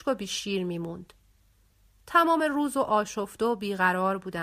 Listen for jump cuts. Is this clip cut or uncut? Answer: uncut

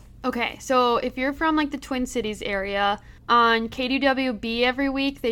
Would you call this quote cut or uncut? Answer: cut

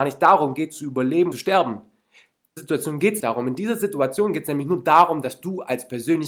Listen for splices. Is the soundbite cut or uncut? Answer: cut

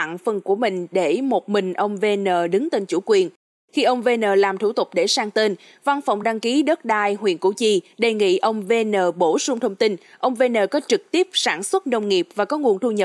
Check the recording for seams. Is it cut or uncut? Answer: uncut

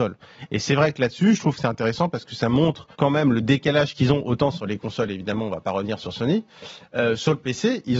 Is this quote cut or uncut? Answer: cut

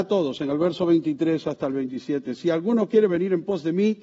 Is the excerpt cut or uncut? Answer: uncut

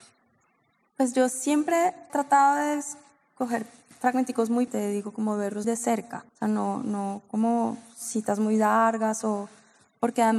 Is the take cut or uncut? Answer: cut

